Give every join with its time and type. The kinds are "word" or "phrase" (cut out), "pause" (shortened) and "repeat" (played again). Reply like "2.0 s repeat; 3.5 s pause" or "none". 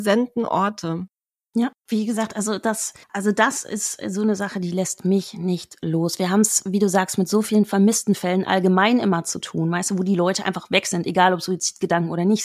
1.8 s pause; 3.0 s pause